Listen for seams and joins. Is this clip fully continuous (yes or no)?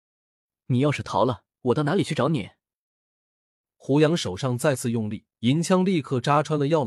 no